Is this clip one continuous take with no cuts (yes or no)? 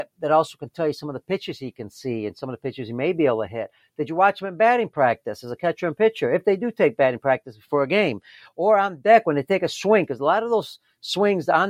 yes